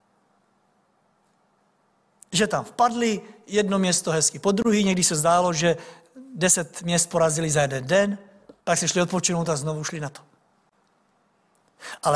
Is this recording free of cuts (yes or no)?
no